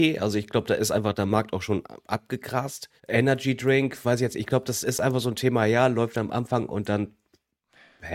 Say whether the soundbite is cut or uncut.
cut